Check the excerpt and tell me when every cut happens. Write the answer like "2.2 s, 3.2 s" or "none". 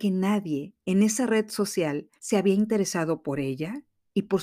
2.2 s